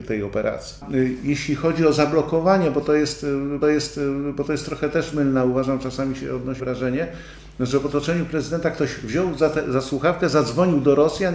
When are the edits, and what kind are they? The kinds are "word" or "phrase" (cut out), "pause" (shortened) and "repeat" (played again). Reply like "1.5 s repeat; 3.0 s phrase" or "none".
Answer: 3.6 s repeat; 6.6 s word